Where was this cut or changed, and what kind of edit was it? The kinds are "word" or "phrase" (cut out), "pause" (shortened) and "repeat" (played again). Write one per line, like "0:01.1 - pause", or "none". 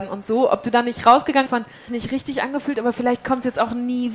0:01.5 - phrase
0:01.9 - phrase